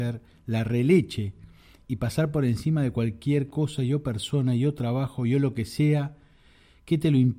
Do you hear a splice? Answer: no; 0 cuts

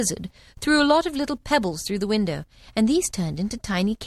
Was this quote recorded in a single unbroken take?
yes; 0 cuts

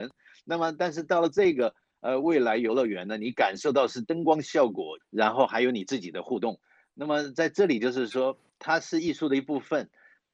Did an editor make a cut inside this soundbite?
yes; 1 cut; at 5.0 s

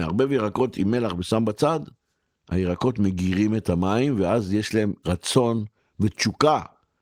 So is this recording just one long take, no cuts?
yes; 0 cuts

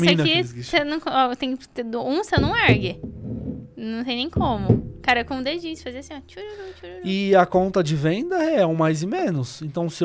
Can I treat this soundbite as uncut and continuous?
yes; 0 cuts

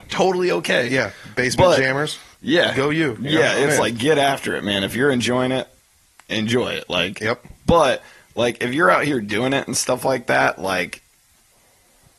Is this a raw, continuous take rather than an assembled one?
yes; 0 cuts

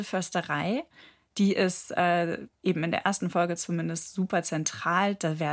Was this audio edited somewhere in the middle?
no; 0 cuts

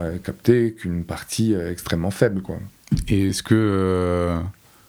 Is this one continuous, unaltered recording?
yes; 0 cuts

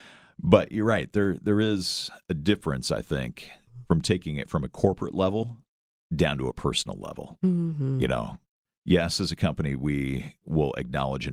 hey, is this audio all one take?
yes; 0 cuts

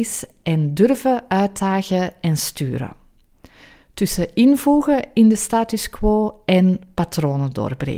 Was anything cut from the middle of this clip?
no; 0 cuts

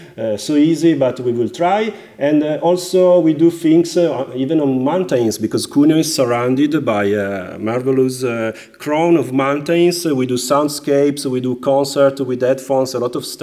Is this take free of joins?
yes; 0 cuts

